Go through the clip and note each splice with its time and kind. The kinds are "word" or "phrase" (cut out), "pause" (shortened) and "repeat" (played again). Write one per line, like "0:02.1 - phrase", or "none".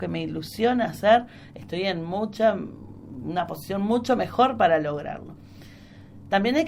none